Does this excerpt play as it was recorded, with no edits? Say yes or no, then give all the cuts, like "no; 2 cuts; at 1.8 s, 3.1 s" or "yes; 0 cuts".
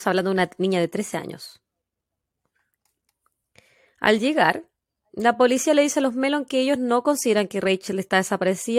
yes; 0 cuts